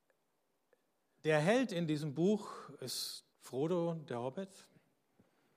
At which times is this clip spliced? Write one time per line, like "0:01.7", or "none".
0:03.3